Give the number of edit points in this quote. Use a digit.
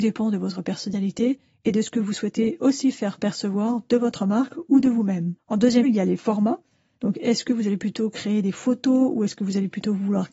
2